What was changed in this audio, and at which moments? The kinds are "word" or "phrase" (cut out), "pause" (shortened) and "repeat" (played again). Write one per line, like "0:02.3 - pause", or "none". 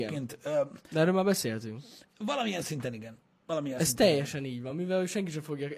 none